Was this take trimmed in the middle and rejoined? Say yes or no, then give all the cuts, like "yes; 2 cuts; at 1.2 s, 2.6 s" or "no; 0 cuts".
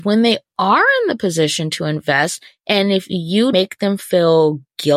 yes; 1 cut; at 3.5 s